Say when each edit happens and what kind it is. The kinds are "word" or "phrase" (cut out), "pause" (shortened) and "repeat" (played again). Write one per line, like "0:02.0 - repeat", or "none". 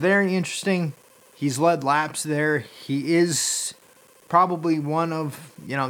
0:01.1 - pause